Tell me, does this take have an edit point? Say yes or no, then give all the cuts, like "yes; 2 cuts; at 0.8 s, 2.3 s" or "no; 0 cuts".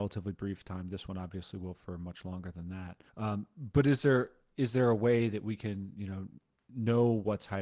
yes; 1 cut; at 3.1 s